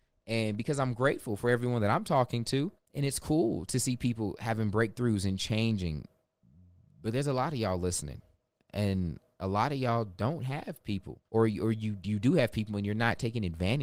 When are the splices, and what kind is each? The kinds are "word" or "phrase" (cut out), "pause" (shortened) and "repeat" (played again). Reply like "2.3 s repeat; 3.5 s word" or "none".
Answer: 2.8 s pause; 11.3 s pause